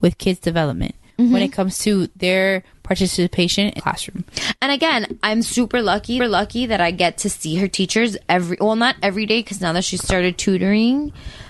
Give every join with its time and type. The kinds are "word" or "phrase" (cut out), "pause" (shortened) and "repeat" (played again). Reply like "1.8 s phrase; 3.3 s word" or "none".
3.8 s word; 6.2 s repeat